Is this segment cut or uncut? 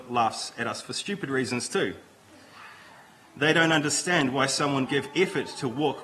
cut